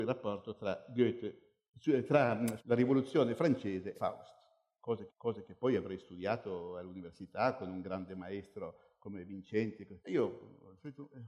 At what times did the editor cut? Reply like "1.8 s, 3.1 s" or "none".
2.6 s, 3.9 s, 5.1 s, 10.0 s